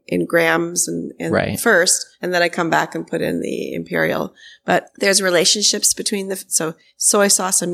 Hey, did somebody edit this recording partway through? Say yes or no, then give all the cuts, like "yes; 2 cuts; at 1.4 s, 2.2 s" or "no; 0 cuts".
no; 0 cuts